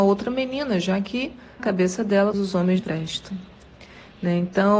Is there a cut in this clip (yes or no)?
yes